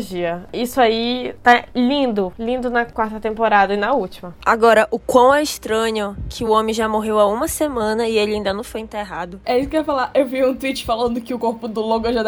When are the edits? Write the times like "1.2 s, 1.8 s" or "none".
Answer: none